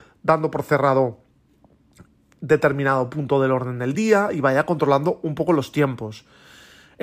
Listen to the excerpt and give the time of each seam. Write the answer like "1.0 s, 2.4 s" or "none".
none